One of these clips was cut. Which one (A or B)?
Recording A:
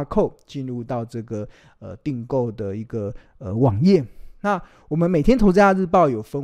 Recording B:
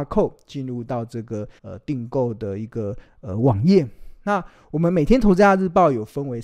B